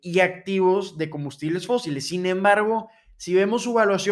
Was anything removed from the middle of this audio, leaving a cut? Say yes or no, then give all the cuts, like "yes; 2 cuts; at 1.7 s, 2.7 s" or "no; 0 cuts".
no; 0 cuts